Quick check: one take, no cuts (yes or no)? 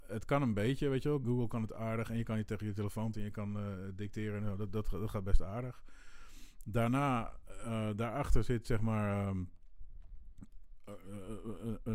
no